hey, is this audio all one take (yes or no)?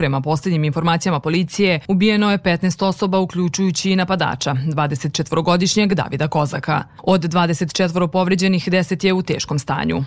yes